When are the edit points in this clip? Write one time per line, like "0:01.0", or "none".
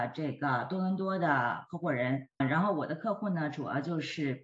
0:02.4